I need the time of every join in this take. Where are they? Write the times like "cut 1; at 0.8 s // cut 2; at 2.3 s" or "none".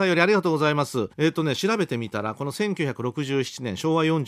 cut 1; at 1.1 s